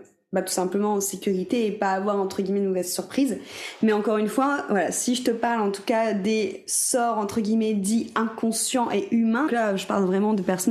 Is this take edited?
yes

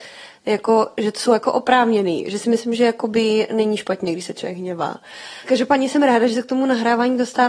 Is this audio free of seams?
yes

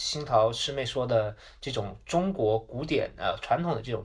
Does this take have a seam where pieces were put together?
no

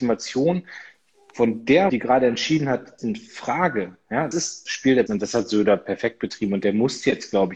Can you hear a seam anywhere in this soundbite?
yes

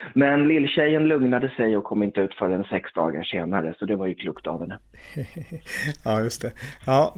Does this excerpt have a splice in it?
no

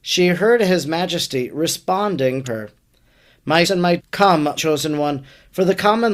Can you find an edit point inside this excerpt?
yes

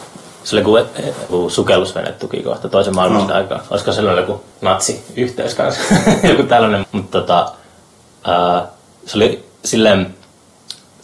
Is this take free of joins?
no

